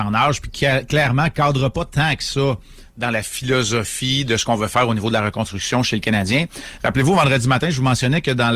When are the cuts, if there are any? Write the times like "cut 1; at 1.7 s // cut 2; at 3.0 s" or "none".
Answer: none